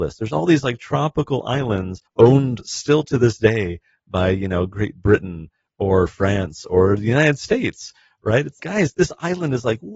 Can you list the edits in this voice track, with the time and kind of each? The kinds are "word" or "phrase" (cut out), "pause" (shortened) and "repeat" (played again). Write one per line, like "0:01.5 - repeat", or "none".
0:02.1 - pause
0:08.6 - word